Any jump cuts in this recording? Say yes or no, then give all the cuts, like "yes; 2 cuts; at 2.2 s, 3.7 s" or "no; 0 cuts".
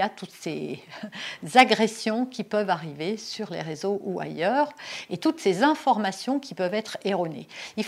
no; 0 cuts